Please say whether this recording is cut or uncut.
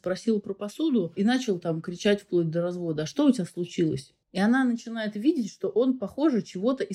cut